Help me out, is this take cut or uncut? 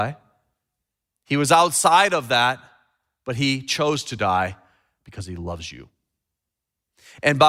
uncut